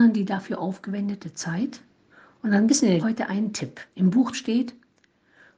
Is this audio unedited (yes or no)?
no